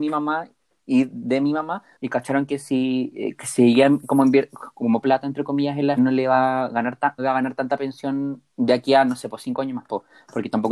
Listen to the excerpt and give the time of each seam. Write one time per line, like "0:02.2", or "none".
0:01.9
0:05.0
0:06.0
0:07.2
0:08.5